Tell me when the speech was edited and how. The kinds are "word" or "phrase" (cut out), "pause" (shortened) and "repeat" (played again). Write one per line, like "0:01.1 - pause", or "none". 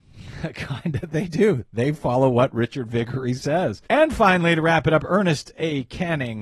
0:03.9 - pause